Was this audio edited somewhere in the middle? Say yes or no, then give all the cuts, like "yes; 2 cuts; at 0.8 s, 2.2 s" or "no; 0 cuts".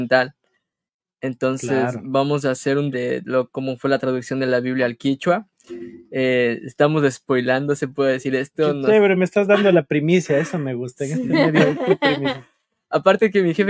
yes; 1 cut; at 2.9 s